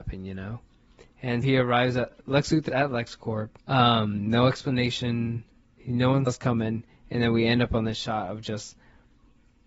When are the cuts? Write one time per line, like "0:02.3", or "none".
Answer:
0:01.4
0:02.7
0:03.6
0:06.3